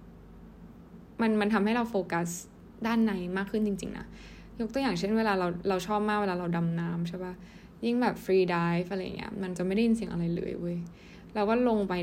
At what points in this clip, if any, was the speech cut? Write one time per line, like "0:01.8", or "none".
none